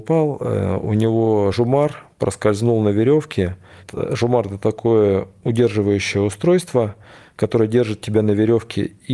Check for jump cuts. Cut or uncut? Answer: uncut